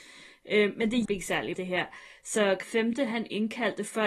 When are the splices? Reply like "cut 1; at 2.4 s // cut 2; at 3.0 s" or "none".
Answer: cut 1; at 1.0 s // cut 2; at 1.5 s // cut 3; at 2.6 s